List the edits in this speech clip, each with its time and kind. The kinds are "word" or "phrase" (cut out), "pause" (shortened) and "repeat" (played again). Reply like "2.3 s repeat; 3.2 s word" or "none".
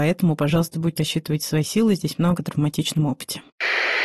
1.0 s word; 2.4 s word